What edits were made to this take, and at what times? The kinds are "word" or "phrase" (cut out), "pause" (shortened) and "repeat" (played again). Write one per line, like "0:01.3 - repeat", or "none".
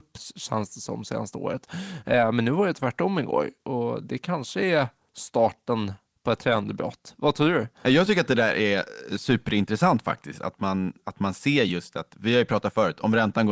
none